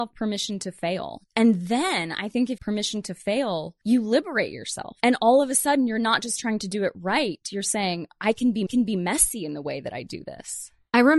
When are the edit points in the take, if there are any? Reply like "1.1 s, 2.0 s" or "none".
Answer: 2.6 s, 3.8 s, 8.7 s